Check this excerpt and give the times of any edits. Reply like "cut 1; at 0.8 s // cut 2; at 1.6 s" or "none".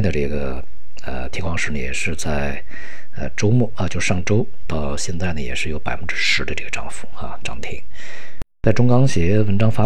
cut 1; at 4.6 s